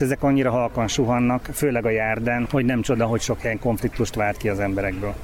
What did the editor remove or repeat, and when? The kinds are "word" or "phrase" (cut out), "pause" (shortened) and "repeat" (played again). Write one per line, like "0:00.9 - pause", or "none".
0:02.5 - word